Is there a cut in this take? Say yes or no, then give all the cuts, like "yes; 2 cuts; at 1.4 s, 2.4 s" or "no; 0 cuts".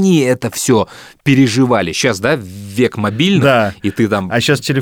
no; 0 cuts